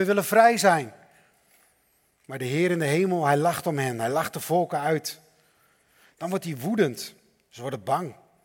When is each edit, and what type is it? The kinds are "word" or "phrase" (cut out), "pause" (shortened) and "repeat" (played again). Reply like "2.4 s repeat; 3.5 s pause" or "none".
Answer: none